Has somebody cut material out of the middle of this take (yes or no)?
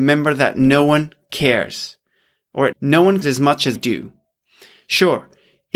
yes